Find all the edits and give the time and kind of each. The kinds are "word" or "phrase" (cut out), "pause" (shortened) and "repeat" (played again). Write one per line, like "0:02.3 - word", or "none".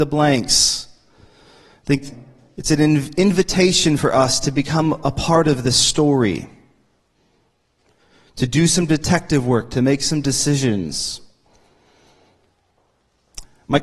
none